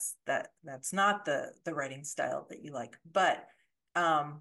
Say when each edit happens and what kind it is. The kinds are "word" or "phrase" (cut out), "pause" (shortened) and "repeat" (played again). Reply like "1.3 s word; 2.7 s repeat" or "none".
none